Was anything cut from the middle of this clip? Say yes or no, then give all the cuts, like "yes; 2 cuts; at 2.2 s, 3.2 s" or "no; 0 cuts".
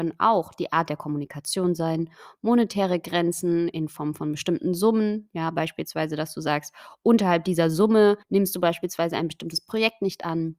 yes; 1 cut; at 8.2 s